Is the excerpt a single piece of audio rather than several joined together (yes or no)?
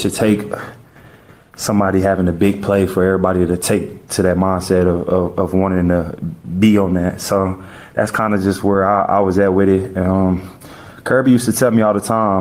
yes